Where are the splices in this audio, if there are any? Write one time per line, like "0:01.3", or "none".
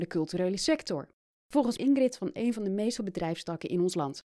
0:01.8
0:02.4
0:03.0